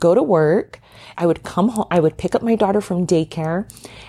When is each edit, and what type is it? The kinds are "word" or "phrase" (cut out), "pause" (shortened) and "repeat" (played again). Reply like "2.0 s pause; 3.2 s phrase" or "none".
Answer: 1.1 s word